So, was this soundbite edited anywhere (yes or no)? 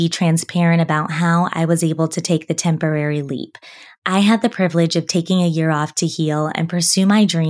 no